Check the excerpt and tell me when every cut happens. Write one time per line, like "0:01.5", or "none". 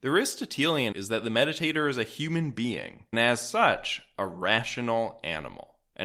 0:00.9
0:03.1